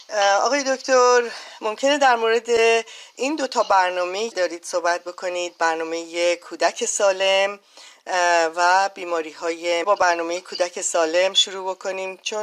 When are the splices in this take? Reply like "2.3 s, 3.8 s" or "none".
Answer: 4.3 s, 9.8 s

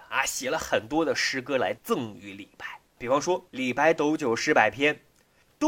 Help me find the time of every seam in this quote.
2.9 s, 3.5 s

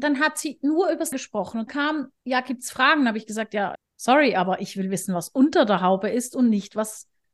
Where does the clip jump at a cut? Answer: 1.1 s, 1.7 s, 2.2 s, 3.7 s

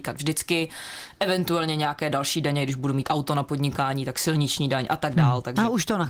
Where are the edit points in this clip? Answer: none

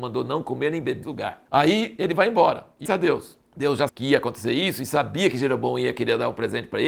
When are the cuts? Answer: 1.0 s, 1.5 s, 2.9 s, 3.4 s, 3.9 s

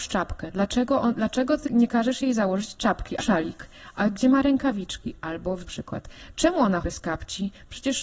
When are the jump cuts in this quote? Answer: 1.7 s, 3.2 s, 5.7 s, 6.8 s

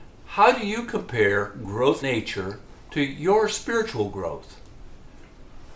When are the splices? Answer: 2.0 s

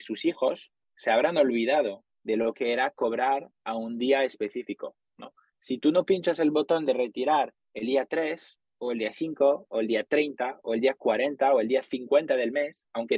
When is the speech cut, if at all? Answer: none

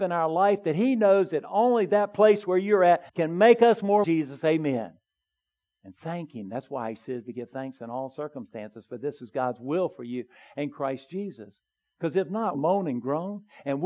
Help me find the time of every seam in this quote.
3.1 s, 4.0 s, 12.5 s

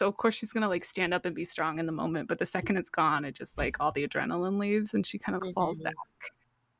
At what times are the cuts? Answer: 5.4 s

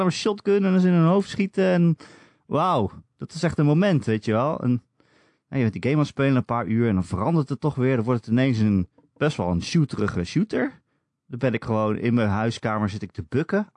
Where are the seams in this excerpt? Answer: none

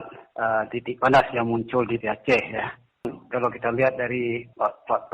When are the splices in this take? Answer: 2.0 s

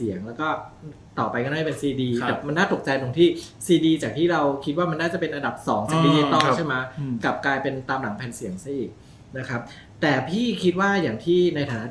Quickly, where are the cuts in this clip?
none

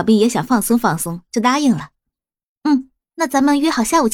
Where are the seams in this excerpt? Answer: 3.0 s

